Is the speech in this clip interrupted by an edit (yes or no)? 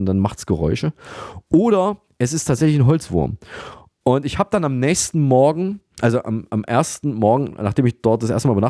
no